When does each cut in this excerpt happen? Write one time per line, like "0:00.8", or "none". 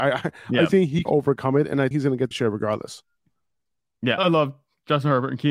0:01.1
0:01.9
0:02.3
0:04.2